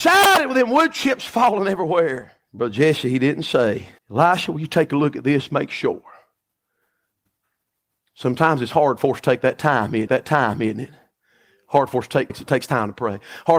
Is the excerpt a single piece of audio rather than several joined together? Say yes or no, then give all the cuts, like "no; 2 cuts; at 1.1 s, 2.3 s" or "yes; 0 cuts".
no; 4 cuts; at 2.4 s, 4.0 s, 10.1 s, 12.3 s